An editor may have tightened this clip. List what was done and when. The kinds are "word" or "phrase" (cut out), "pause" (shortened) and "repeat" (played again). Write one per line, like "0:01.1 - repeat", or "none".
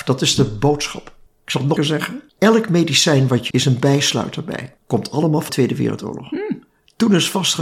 0:01.3 - pause
0:01.8 - word
0:02.3 - pause
0:03.5 - phrase
0:04.8 - pause
0:05.5 - word

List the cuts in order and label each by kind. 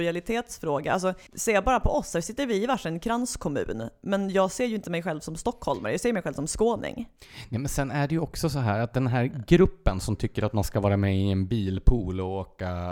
0:01.3 - pause

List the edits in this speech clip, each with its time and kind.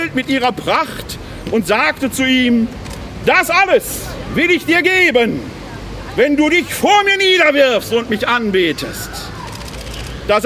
none

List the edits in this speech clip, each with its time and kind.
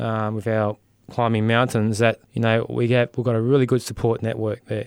0:02.2 - pause

